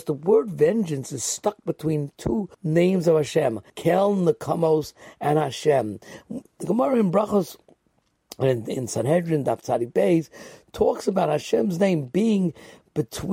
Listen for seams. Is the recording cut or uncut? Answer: cut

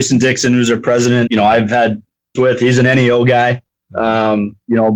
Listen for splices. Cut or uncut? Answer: cut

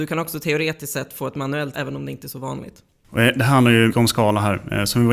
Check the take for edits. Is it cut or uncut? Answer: cut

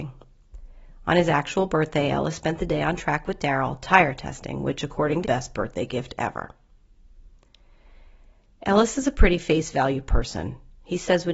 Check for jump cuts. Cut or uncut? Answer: cut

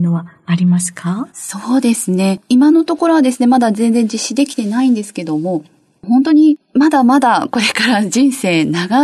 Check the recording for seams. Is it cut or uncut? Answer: uncut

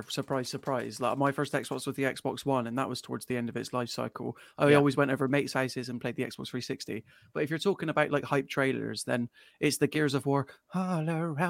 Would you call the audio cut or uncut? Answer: uncut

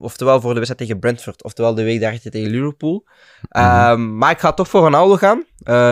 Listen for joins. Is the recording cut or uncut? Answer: uncut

